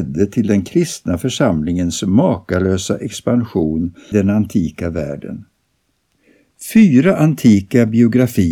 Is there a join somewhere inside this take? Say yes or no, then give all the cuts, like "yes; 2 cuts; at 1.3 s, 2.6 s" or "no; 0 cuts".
yes; 1 cut; at 4.1 s